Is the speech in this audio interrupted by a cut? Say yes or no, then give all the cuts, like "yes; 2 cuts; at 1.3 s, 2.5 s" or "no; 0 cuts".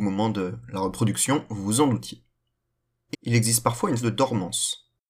yes; 2 cuts; at 3.1 s, 4.0 s